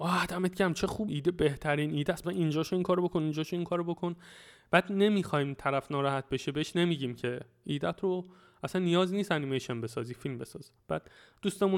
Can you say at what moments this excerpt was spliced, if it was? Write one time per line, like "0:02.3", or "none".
0:01.1
0:02.2